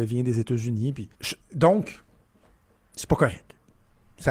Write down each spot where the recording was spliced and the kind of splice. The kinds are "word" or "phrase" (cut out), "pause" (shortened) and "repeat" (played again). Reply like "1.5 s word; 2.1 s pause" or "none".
1.1 s pause

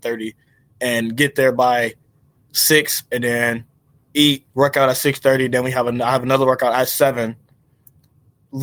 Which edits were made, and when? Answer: 4.5 s pause

